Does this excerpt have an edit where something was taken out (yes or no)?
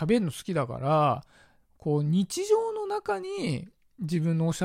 no